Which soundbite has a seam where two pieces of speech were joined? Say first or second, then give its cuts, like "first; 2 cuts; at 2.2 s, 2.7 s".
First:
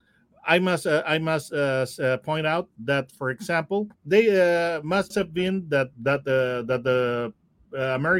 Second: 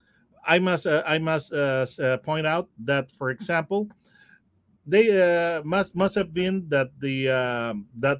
first; 3 cuts; at 3.9 s, 5.1 s, 5.9 s